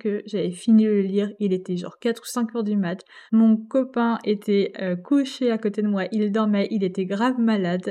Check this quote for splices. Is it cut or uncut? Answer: cut